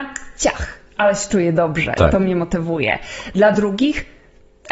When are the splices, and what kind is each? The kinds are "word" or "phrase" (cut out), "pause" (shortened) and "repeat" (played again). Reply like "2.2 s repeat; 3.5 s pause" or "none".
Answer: none